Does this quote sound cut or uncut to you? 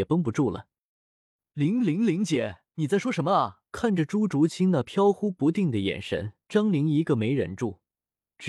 cut